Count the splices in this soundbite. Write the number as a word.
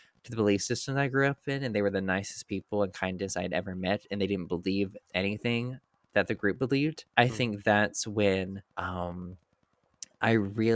three